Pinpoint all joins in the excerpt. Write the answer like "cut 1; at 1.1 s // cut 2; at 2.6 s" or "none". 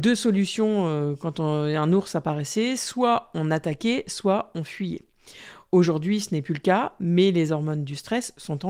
none